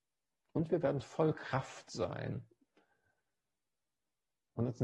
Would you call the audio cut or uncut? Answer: uncut